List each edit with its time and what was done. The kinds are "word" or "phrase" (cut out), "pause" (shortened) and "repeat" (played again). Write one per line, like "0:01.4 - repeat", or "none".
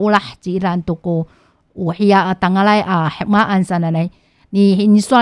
none